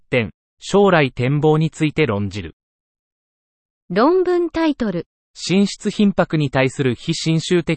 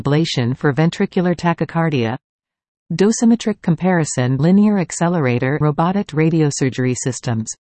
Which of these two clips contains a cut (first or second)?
second